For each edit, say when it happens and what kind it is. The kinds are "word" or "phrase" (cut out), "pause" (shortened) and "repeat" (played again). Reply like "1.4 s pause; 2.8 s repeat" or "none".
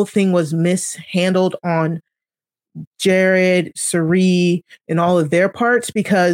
none